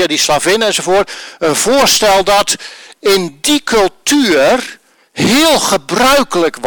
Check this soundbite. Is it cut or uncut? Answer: uncut